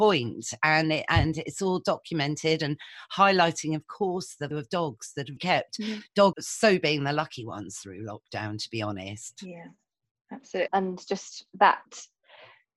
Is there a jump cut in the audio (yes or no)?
yes